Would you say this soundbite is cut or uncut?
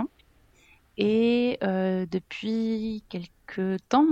uncut